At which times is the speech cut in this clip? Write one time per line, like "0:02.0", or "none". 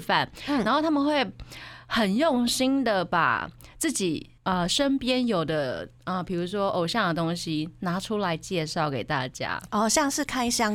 0:04.4
0:06.0